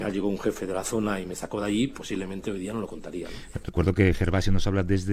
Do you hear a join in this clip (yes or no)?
no